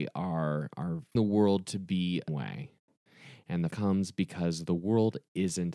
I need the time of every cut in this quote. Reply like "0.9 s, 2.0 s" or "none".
1.1 s, 2.3 s, 3.7 s